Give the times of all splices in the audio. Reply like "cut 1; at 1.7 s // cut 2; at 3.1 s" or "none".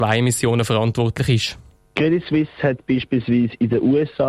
none

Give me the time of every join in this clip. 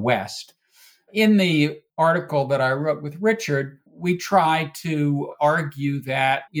cut 1; at 1.9 s // cut 2; at 3.9 s

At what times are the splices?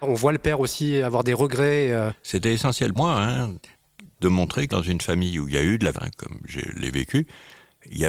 cut 1; at 3.0 s // cut 2; at 4.7 s // cut 3; at 5.9 s

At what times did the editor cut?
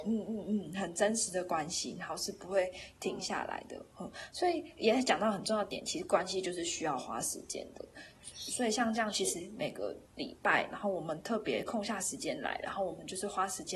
cut 1; at 10.0 s

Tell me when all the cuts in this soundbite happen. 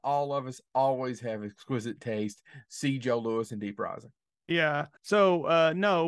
cut 1; at 5.0 s

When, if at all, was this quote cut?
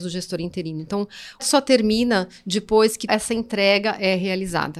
cut 1; at 1.4 s // cut 2; at 3.1 s

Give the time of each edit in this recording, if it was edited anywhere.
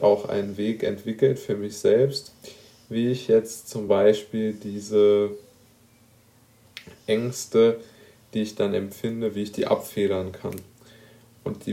none

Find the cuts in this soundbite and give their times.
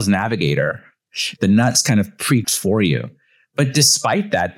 cut 1; at 2.4 s

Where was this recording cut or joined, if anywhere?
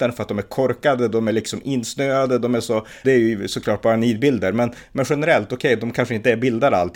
cut 1; at 3.0 s

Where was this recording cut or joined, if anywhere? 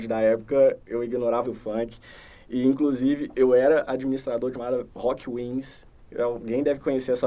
cut 1; at 1.4 s // cut 2; at 4.5 s

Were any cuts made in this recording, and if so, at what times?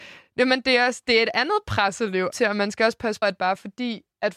cut 1; at 2.3 s // cut 2; at 3.2 s

